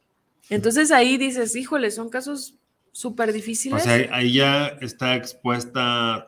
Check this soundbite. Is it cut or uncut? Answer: uncut